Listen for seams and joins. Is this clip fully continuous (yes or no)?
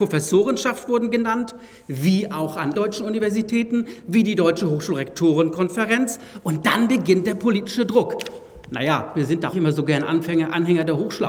no